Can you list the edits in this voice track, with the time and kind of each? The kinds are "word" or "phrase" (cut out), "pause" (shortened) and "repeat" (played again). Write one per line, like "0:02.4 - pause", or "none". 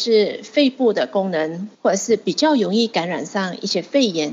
0:01.7 - pause